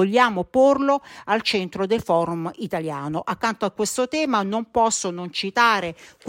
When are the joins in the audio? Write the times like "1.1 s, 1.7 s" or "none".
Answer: none